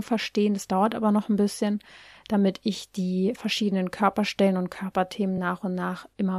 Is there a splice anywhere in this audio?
no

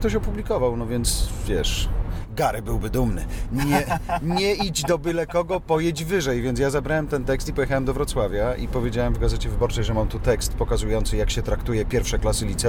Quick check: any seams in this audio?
no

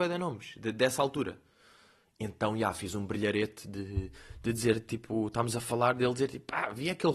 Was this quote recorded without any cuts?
yes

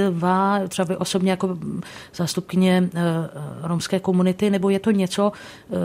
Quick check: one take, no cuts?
yes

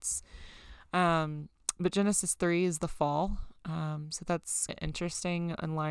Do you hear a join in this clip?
yes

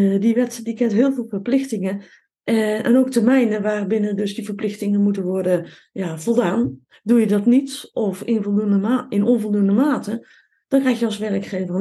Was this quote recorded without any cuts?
yes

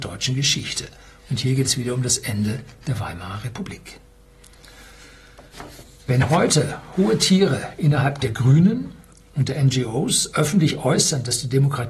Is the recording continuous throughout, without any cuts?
yes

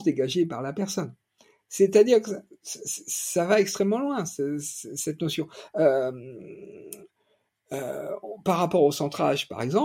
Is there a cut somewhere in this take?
no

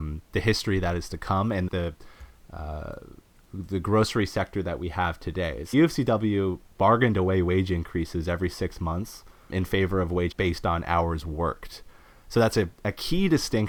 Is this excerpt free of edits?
no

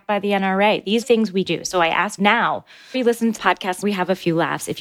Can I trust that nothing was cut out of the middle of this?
no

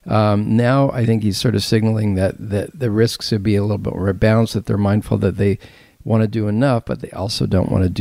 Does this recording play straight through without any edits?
yes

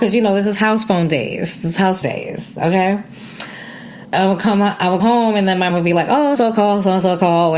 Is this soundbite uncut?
no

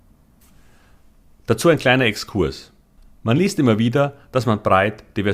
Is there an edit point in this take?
no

